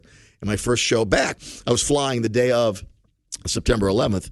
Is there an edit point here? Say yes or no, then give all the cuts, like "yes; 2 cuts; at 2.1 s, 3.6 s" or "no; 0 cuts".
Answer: no; 0 cuts